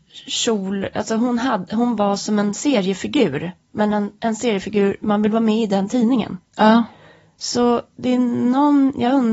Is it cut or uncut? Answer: uncut